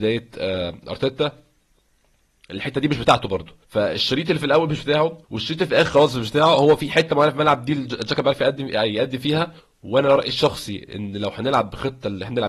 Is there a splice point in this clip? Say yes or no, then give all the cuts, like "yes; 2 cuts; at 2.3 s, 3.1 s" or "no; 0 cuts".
yes; 3 cuts; at 3.6 s, 5.2 s, 9.6 s